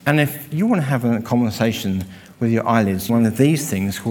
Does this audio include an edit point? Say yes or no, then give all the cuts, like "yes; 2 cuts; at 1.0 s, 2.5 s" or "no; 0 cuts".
yes; 1 cut; at 3.1 s